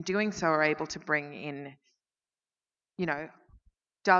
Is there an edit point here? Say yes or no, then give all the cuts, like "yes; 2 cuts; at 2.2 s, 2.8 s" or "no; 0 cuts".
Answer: no; 0 cuts